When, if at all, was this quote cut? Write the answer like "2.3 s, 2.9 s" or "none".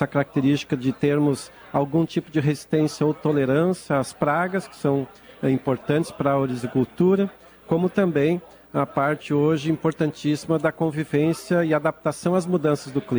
none